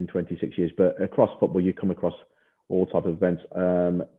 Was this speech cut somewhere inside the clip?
no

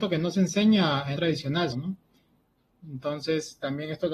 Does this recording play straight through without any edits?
no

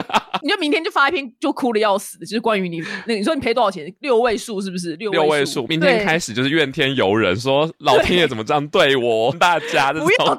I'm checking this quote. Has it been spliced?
yes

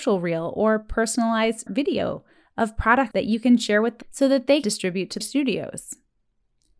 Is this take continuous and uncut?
no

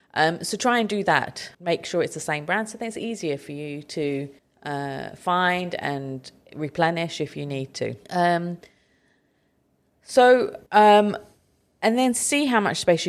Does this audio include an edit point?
yes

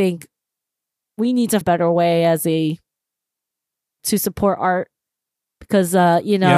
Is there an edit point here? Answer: yes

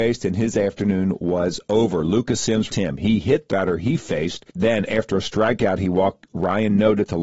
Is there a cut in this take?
yes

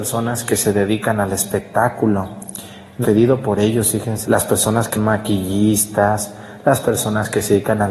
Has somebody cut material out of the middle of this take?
yes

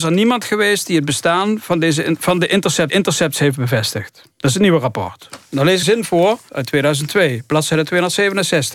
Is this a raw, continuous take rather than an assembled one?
no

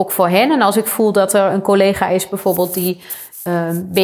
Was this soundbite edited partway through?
no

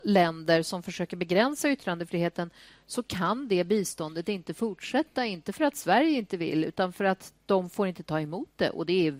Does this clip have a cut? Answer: no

